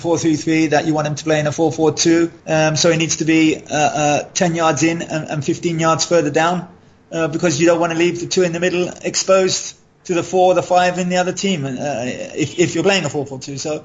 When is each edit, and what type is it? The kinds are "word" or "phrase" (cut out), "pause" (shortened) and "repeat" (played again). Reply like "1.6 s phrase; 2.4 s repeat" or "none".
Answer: 2.4 s pause